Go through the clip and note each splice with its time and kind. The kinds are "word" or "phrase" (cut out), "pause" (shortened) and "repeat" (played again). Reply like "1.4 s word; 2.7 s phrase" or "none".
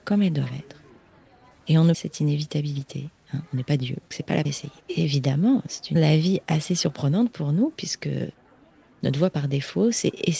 1.9 s phrase; 4.1 s word; 4.4 s word; 4.8 s pause; 5.9 s word